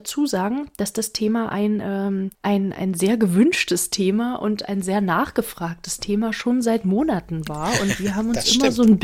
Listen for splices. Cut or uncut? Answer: cut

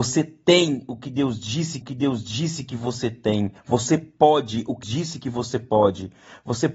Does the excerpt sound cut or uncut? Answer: cut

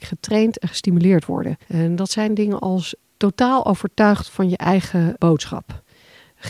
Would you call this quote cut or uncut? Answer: cut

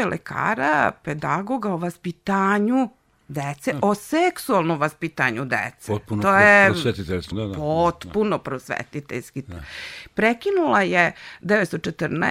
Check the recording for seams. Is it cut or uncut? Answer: cut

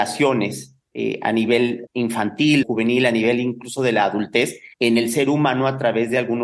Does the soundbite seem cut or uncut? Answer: cut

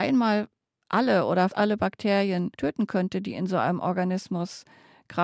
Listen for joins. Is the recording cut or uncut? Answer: cut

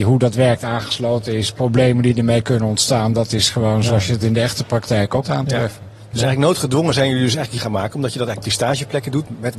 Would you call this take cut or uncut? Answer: cut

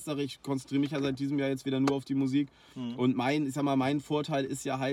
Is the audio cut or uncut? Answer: uncut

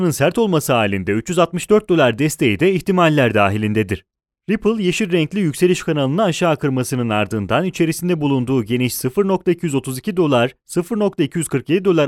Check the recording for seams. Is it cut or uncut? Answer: cut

